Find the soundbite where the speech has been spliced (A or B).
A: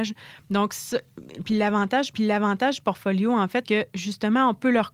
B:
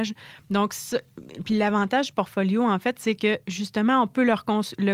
A